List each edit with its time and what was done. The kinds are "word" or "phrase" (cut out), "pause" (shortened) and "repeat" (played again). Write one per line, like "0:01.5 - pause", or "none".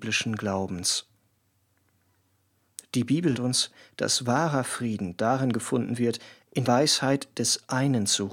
0:03.3 - word
0:06.6 - word